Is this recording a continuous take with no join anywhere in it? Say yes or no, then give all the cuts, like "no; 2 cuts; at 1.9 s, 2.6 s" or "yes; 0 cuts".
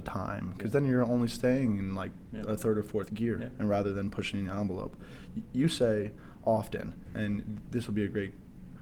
no; 1 cut; at 3.1 s